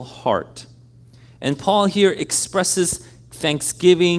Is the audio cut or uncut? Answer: uncut